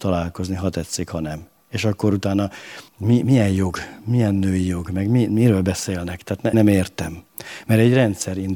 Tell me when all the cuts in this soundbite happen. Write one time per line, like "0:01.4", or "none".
0:02.9
0:06.5